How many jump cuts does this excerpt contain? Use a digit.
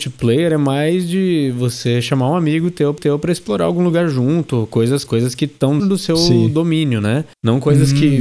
3